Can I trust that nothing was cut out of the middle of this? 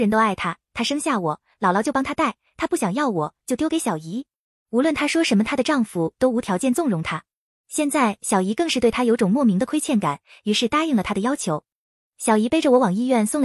yes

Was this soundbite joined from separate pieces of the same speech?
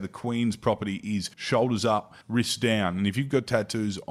yes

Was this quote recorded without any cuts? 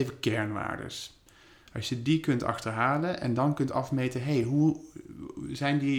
yes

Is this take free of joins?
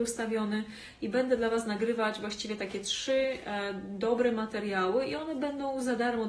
yes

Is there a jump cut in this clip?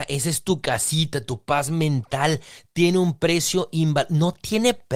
no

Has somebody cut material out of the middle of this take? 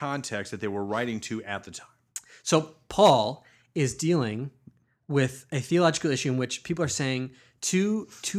no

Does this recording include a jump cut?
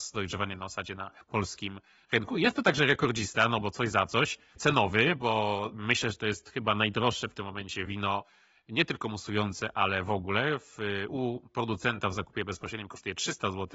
no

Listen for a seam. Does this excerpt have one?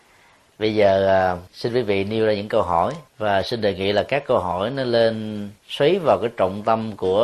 yes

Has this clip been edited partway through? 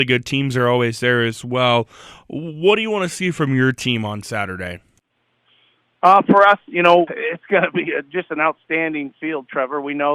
yes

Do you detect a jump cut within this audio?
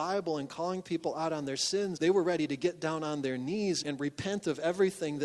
yes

